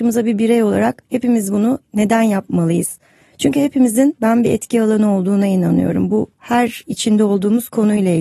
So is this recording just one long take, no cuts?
yes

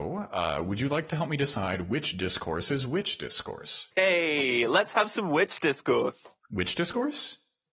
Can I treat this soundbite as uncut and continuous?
no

